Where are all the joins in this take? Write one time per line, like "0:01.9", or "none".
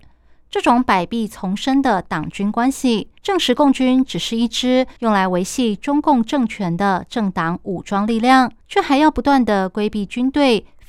0:03.2
0:05.0
0:08.6